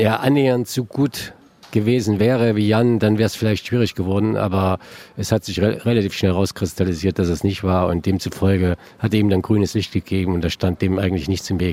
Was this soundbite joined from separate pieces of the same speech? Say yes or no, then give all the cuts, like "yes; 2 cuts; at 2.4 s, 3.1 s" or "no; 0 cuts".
no; 0 cuts